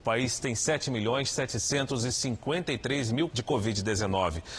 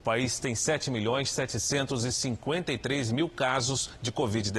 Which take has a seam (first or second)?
first